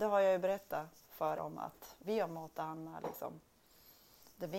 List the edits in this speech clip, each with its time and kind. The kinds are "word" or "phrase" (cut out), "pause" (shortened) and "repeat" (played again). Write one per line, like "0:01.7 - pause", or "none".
0:01.4 - word
0:02.0 - word